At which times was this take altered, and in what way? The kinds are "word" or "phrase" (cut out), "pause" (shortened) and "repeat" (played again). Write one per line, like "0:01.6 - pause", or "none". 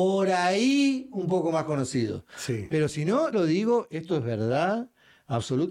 0:03.3 - phrase